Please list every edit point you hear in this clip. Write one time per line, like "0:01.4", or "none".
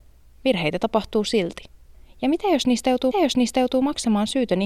0:01.9
0:03.1